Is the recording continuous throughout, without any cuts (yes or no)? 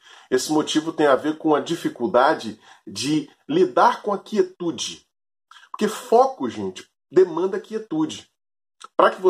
yes